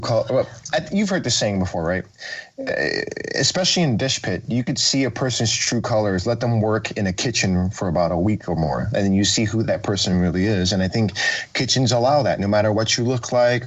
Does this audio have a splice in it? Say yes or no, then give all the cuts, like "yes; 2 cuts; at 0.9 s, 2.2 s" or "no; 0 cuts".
no; 0 cuts